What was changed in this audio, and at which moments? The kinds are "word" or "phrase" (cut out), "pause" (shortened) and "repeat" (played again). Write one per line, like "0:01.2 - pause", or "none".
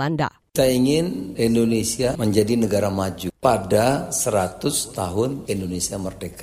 none